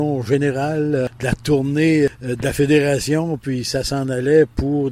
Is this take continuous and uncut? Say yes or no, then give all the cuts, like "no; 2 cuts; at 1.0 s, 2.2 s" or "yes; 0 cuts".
yes; 0 cuts